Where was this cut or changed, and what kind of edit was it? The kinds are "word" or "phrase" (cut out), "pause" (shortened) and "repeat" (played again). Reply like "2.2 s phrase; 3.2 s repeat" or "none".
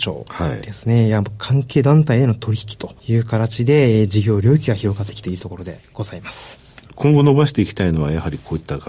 3.0 s pause